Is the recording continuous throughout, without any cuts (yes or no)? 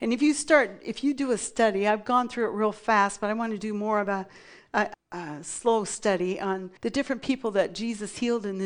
no